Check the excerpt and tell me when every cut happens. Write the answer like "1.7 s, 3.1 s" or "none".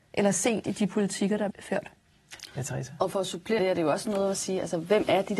1.5 s, 3.6 s

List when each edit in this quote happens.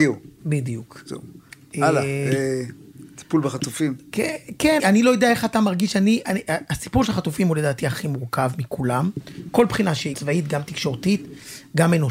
4.8 s, 10.1 s

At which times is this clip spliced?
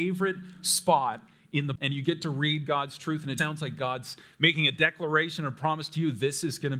1.8 s, 3.4 s

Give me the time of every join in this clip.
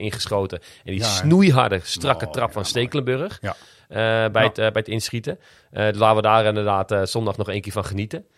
none

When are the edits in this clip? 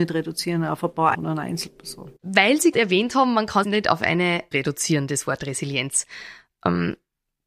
1.1 s, 2.2 s, 2.7 s, 3.6 s, 4.5 s

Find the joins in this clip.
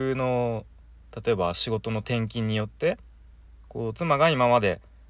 3.6 s

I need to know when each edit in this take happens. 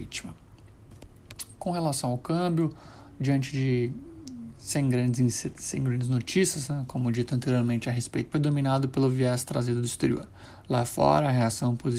8.3 s

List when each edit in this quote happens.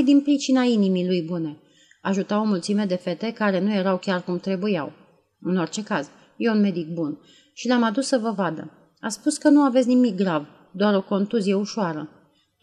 none

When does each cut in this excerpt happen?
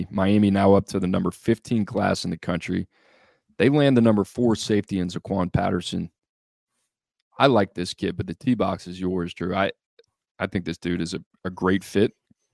none

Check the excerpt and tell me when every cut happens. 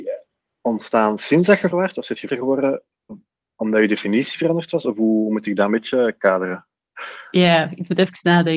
1.7 s, 2.3 s

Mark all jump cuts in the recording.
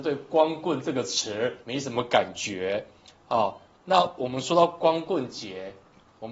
1.6 s, 3.7 s

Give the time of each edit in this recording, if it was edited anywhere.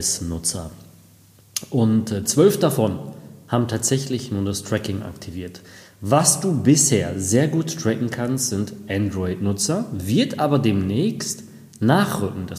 none

